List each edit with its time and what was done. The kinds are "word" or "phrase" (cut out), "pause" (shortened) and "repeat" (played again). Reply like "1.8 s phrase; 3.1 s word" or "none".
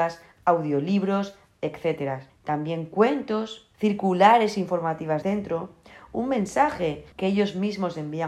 2.3 s pause; 3.7 s pause; 5.2 s word; 7.1 s pause